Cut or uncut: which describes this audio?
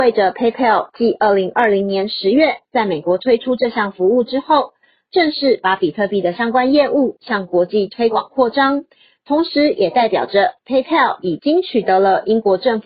uncut